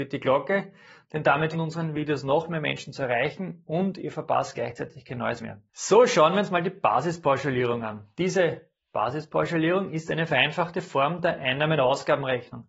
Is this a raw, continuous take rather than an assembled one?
no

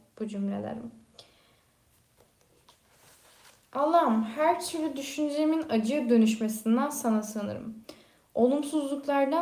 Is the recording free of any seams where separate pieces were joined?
yes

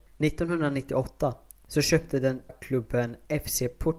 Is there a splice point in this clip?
yes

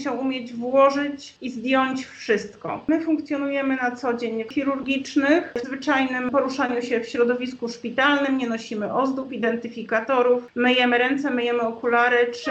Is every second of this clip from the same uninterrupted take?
no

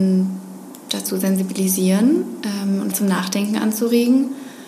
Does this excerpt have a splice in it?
yes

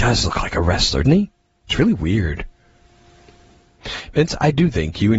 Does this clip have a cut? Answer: yes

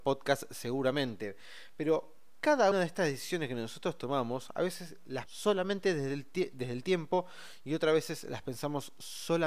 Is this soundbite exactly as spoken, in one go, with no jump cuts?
no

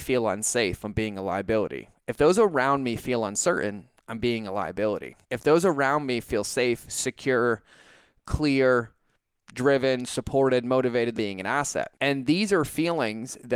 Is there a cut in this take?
yes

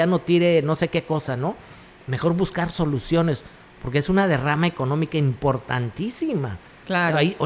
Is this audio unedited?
yes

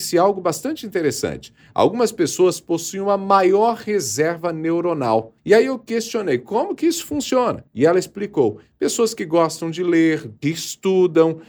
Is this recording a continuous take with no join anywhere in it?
no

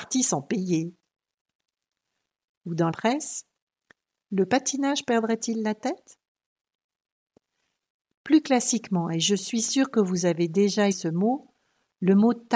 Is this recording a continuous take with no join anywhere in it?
no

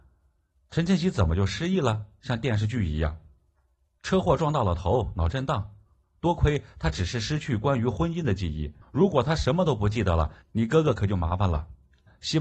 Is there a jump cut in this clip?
yes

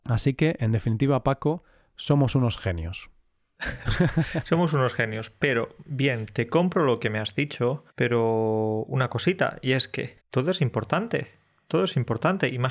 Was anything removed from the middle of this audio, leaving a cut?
yes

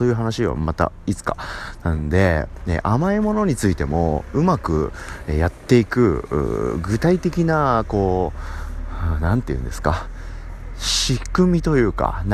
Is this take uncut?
yes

